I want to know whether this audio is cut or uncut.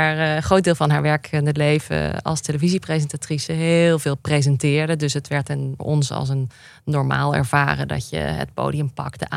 cut